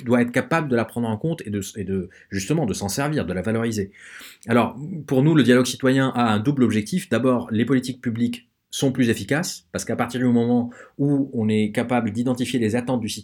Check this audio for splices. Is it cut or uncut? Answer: uncut